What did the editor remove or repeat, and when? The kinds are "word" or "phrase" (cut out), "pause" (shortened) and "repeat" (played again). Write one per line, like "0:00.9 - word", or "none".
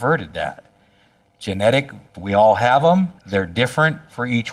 0:02.1 - word
0:03.2 - pause

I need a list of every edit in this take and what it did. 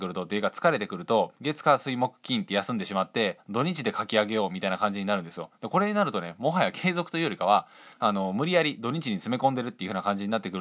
0:07.9 - pause

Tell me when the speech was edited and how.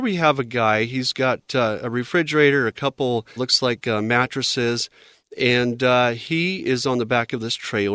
0:03.4 - word

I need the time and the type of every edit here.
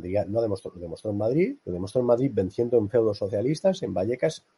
0:01.6 - pause

